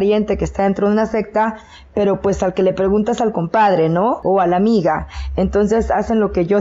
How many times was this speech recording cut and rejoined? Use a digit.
0